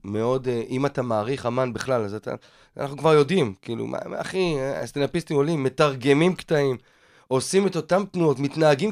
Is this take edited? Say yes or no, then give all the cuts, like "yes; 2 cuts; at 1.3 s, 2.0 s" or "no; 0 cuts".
no; 0 cuts